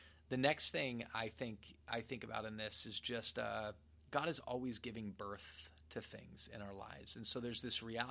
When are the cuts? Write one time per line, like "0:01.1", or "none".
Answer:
none